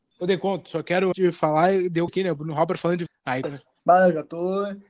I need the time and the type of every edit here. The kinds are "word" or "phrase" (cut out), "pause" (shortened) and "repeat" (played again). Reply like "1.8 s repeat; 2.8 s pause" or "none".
1.1 s word; 2.1 s word; 3.1 s word; 3.4 s word